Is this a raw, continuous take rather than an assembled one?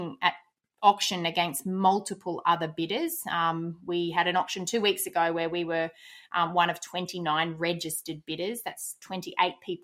yes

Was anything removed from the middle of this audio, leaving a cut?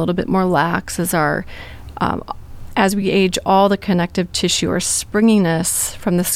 no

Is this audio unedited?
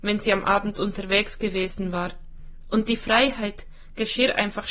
yes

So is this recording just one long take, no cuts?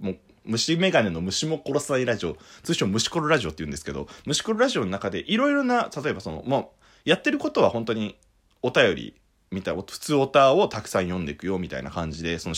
yes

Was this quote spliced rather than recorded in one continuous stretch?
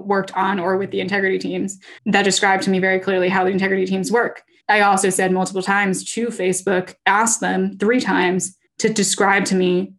yes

